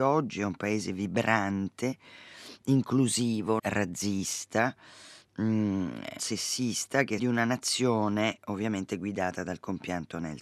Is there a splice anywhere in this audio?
yes; 3 cuts; at 3.6 s, 6.2 s, 7.2 s

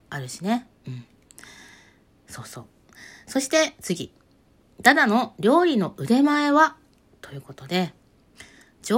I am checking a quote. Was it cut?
no; 0 cuts

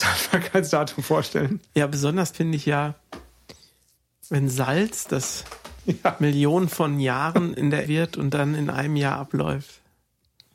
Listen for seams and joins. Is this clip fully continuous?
no; 2 cuts; at 2.3 s, 7.8 s

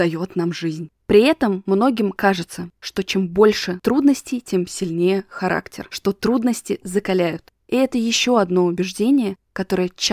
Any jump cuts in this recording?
no; 0 cuts

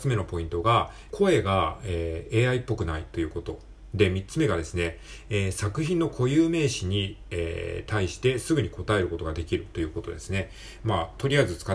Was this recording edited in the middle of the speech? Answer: yes; 1 cut; at 1.1 s

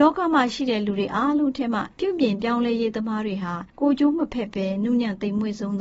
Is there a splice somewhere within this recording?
yes; 2 cuts; at 1.9 s, 3.7 s

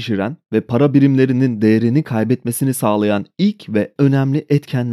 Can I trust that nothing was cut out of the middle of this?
no; 1 cut; at 4.0 s

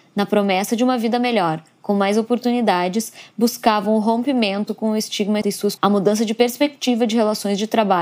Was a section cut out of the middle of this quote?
yes; 2 cuts; at 5.4 s, 5.8 s

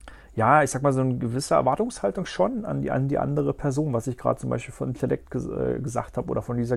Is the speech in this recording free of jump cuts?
yes; 0 cuts

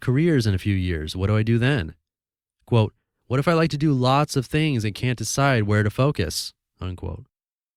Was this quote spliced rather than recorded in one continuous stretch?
no; 0 cuts

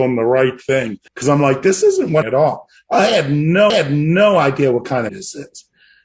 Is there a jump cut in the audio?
yes; 4 cuts; at 1.1 s, 2.2 s, 3.7 s, 5.1 s

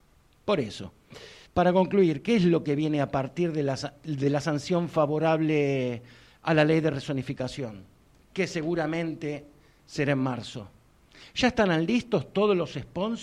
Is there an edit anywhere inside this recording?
yes; 2 cuts; at 1.5 s, 8.1 s

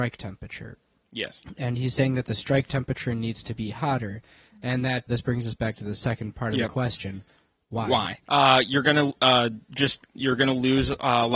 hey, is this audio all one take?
no; 1 cut; at 5.1 s

